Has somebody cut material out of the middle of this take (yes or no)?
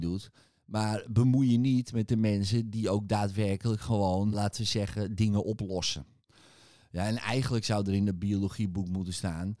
yes